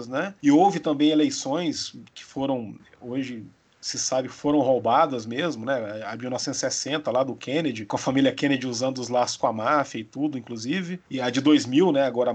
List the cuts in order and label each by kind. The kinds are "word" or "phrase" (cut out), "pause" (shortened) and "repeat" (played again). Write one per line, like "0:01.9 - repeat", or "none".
none